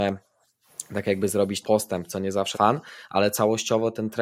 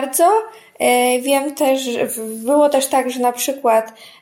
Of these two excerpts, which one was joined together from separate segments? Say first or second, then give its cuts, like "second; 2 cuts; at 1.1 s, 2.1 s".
first; 2 cuts; at 1.6 s, 2.5 s